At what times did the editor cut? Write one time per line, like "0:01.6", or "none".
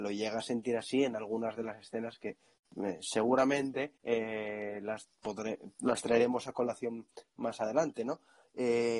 0:04.0
0:05.7